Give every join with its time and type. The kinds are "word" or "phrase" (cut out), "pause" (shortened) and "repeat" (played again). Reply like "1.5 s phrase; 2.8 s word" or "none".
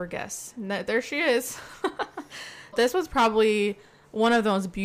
2.7 s word